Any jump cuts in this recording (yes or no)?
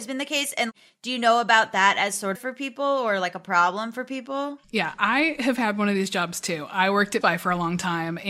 yes